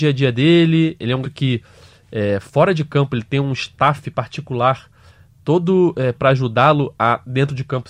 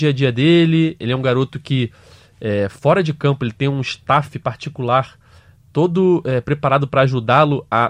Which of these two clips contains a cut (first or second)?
first